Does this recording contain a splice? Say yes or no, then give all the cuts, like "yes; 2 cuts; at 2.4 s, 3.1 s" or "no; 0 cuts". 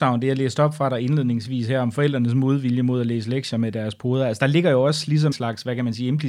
yes; 1 cut; at 5.3 s